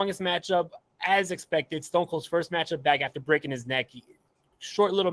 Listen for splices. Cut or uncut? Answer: uncut